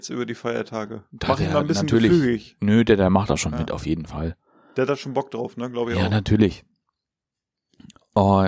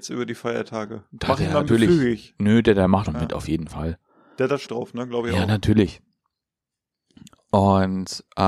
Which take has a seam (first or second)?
second